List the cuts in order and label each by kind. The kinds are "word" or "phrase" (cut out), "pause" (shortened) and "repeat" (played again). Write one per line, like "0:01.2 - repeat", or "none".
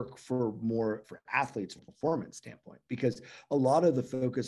0:01.0 - word
0:01.8 - word